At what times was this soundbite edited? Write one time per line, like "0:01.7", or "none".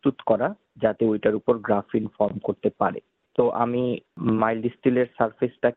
none